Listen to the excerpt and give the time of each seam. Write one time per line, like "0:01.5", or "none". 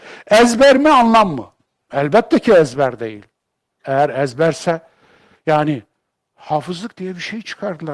none